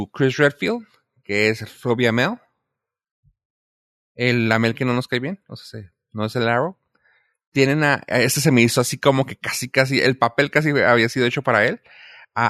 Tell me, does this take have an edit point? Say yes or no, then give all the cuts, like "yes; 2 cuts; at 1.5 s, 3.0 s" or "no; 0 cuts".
no; 0 cuts